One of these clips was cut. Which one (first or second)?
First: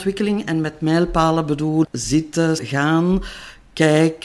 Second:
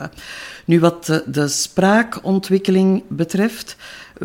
first